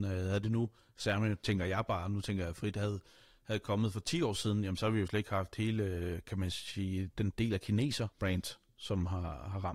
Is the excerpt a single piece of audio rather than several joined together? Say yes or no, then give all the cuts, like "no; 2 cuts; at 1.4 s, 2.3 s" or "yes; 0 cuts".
no; 1 cut; at 8.1 s